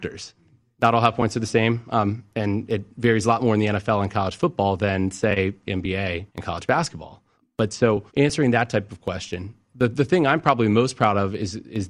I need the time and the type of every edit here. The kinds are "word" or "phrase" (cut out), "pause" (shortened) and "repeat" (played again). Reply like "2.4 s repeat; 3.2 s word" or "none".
6.3 s pause; 7.3 s pause; 8.1 s pause